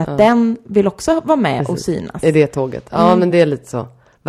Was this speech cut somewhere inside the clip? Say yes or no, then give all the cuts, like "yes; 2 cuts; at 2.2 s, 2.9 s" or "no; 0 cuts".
no; 0 cuts